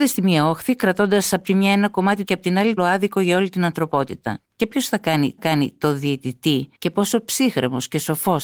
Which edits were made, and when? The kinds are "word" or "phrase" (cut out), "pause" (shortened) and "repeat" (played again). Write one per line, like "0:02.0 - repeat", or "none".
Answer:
0:02.3 - phrase
0:02.8 - phrase
0:04.4 - pause
0:05.4 - repeat
0:06.7 - pause